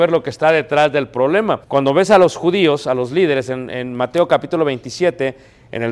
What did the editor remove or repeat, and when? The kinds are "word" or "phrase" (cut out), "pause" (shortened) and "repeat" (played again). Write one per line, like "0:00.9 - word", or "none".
0:01.6 - pause